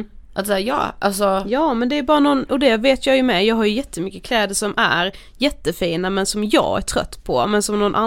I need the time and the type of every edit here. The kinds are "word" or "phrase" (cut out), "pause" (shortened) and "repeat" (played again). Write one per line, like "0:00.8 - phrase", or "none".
none